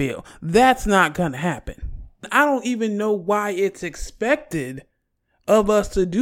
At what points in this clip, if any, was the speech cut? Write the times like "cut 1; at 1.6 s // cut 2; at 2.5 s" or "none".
none

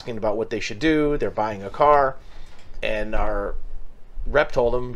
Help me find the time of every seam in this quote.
cut 1; at 2.8 s

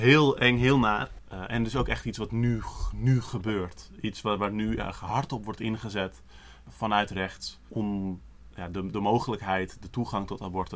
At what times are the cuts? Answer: none

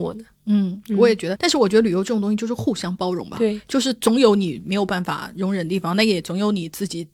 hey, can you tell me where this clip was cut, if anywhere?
cut 1; at 1.4 s

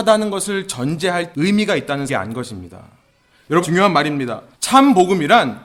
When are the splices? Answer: cut 1; at 1.3 s // cut 2; at 2.1 s // cut 3; at 3.6 s // cut 4; at 4.5 s

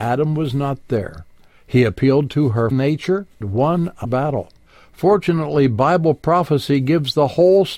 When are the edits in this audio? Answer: cut 1; at 2.7 s // cut 2; at 3.4 s // cut 3; at 4.0 s

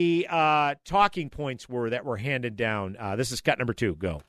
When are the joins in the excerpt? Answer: none

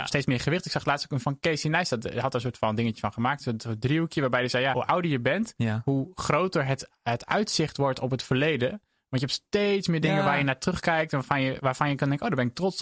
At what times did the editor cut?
cut 1; at 1.2 s

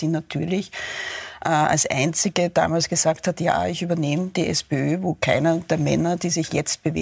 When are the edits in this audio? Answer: none

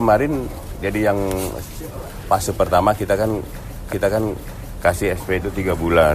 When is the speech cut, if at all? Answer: cut 1; at 2.3 s // cut 2; at 3.9 s

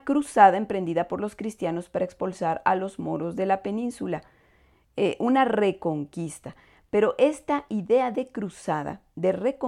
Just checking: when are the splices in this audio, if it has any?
none

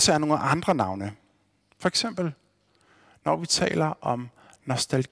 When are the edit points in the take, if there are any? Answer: none

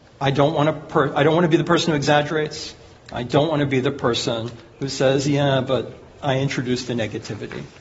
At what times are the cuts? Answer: none

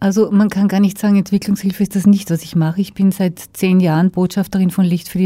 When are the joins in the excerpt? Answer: none

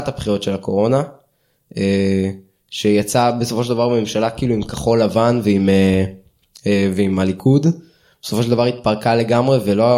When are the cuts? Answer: none

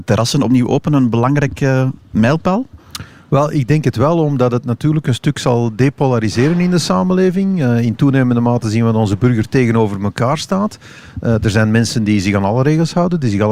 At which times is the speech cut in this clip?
none

